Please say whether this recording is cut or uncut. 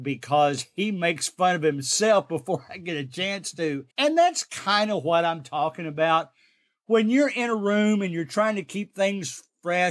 cut